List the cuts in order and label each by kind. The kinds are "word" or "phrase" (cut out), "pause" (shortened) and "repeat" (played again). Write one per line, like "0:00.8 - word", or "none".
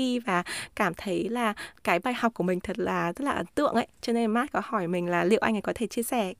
0:01.7 - word